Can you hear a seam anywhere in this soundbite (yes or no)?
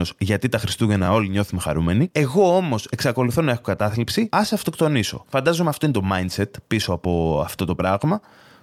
no